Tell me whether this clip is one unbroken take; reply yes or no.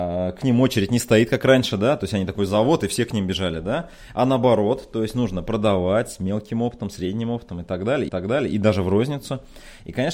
no